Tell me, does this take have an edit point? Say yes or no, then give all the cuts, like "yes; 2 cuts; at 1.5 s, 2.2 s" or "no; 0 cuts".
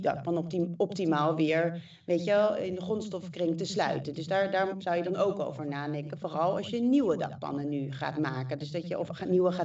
no; 0 cuts